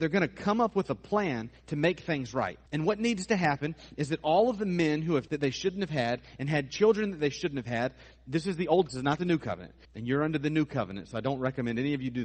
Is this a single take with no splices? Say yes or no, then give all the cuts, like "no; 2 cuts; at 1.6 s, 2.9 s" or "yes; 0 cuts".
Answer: no; 4 cuts; at 2.7 s, 5.3 s, 8.9 s, 9.8 s